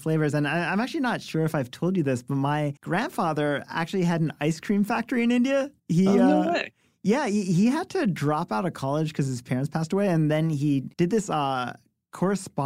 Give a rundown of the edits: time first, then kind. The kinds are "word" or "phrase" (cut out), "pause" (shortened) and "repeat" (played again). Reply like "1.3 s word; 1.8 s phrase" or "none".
2.8 s pause; 5.8 s pause; 10.9 s pause

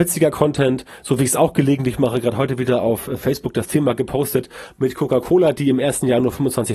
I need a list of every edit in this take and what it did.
none

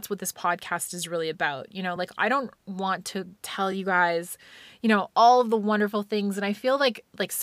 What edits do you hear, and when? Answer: none

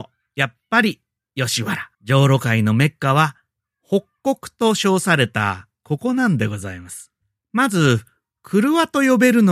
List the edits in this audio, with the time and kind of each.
1.9 s pause; 7.2 s pause

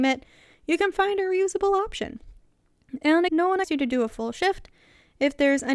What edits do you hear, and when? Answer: 0.9 s word; 3.3 s word; 3.6 s word

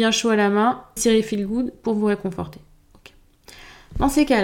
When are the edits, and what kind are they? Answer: 1.0 s word

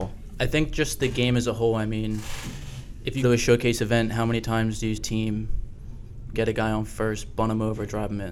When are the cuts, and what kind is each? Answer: 3.2 s word; 5.0 s word; 6.3 s phrase

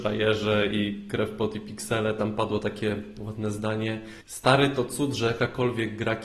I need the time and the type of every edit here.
4.2 s pause

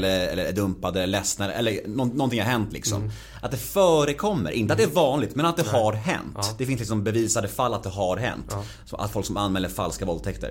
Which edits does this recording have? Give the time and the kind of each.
none

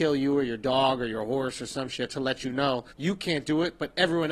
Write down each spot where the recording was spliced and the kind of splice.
2.9 s pause

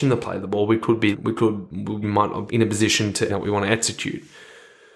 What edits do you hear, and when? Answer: 1.1 s word; 2.0 s word; 2.5 s word; 3.3 s phrase

